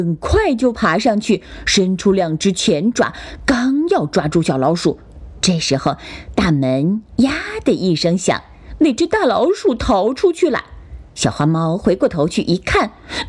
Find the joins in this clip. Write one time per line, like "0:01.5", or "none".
0:11.1